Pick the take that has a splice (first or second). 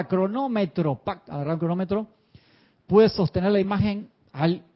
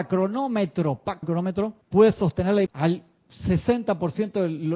second